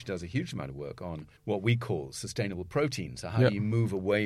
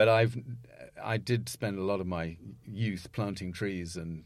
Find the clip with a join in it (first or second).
first